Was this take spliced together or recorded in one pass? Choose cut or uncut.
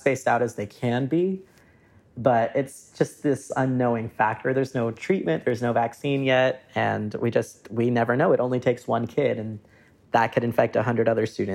uncut